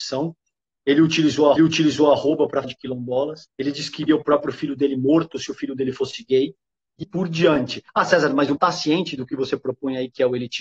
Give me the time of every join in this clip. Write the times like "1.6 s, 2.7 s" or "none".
1.6 s, 2.6 s, 3.5 s, 4.1 s, 7.0 s, 7.9 s, 8.6 s